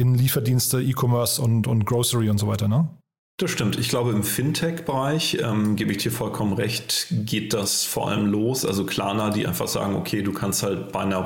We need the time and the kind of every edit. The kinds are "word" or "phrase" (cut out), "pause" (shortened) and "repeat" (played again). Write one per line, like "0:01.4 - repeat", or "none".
none